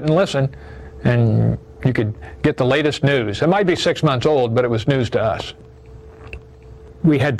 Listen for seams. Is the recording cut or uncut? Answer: uncut